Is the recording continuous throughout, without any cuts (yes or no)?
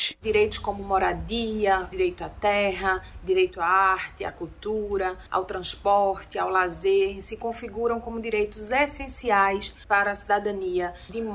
yes